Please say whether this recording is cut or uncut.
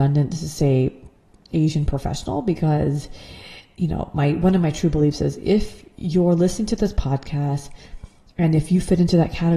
uncut